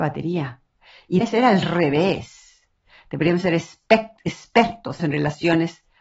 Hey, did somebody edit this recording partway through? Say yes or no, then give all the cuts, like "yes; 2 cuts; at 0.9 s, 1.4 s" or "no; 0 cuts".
yes; 2 cuts; at 1.2 s, 5.0 s